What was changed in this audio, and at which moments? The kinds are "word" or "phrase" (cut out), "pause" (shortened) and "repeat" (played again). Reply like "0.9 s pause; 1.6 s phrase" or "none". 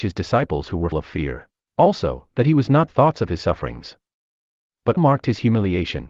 0.9 s word; 1.6 s pause; 2.9 s phrase; 3.4 s word; 5.0 s word